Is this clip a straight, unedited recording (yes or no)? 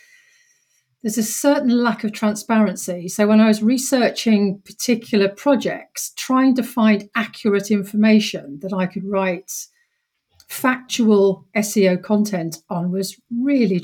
yes